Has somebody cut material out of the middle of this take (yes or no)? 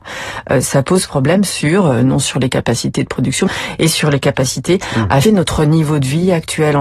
yes